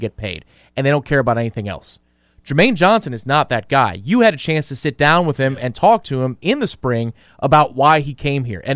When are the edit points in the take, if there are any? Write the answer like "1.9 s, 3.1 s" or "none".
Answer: none